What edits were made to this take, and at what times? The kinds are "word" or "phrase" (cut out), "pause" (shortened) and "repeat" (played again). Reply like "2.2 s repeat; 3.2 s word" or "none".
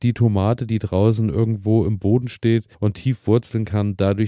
2.7 s pause